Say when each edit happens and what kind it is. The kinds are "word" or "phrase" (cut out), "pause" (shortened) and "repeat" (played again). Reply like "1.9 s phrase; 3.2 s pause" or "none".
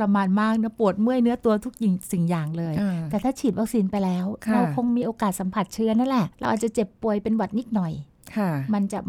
6.3 s pause